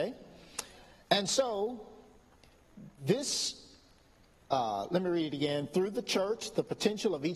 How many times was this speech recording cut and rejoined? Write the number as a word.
zero